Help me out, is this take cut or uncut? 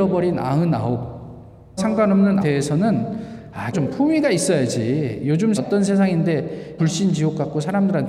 cut